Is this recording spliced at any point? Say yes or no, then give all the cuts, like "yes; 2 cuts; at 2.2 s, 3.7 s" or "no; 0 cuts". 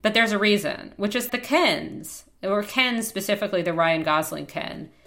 yes; 1 cut; at 1.3 s